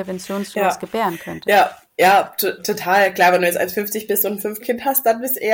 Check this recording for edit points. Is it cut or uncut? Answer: cut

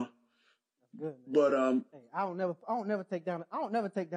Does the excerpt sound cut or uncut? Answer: uncut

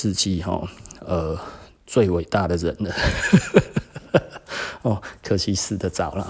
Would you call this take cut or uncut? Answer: uncut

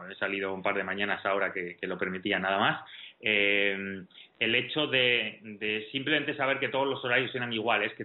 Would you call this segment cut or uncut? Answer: uncut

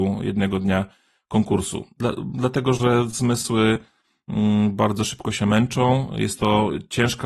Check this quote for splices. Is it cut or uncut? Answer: uncut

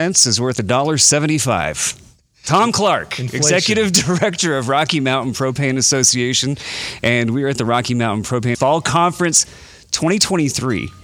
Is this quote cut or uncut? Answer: cut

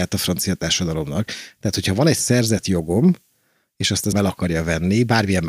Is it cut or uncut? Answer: cut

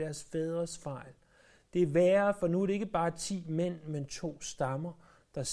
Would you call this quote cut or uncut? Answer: uncut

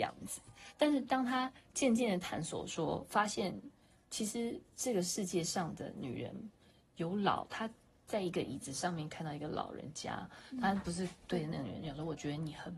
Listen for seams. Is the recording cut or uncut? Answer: uncut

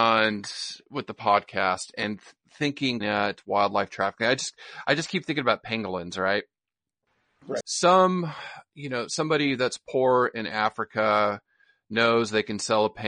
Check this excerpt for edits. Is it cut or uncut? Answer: cut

